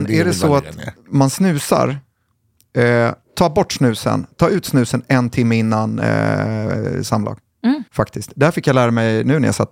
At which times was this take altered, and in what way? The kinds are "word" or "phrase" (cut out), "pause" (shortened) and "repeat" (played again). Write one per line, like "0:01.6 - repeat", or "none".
0:03.2 - pause
0:07.9 - pause